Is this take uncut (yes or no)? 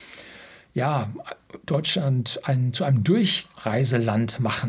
yes